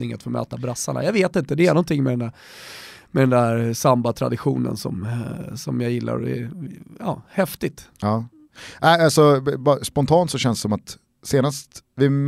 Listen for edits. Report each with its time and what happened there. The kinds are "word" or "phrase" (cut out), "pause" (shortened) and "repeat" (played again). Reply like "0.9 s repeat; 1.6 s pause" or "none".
none